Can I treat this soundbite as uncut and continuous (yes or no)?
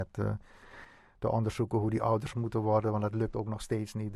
no